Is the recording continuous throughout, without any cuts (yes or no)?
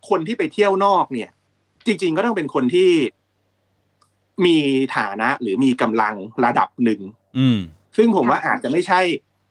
no